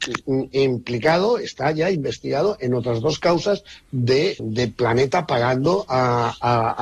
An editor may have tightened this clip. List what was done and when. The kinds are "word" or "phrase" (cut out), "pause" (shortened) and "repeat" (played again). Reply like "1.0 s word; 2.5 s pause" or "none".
4.4 s word